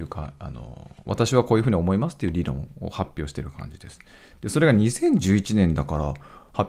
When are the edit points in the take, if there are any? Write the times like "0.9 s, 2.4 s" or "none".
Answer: none